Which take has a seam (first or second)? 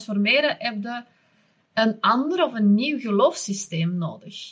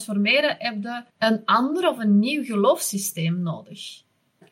second